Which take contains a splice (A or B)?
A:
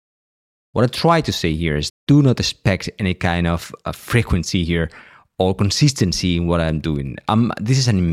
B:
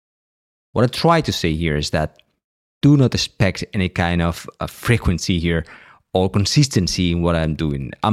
A